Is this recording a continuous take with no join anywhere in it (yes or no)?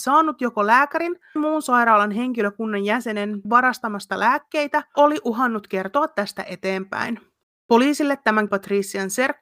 no